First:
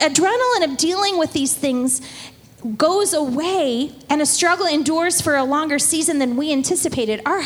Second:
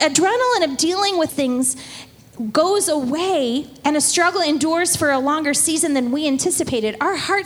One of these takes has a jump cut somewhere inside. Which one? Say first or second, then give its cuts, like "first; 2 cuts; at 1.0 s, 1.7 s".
second; 1 cut; at 1.3 s